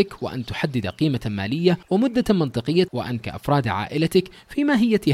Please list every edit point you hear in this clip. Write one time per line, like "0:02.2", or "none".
0:01.8
0:02.9
0:03.2